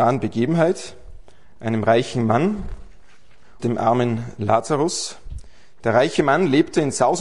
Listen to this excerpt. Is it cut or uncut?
cut